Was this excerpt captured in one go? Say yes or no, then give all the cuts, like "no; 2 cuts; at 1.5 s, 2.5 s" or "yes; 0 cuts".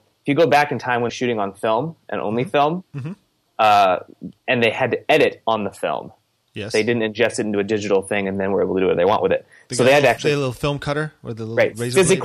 no; 2 cuts; at 1.1 s, 4.4 s